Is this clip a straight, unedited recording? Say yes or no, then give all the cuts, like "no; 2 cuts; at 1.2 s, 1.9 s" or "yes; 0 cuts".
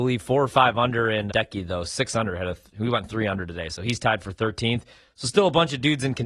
no; 1 cut; at 1.3 s